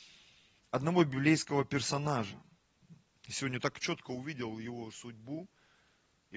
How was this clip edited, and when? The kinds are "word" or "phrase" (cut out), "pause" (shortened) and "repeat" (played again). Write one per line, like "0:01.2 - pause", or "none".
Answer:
0:04.9 - word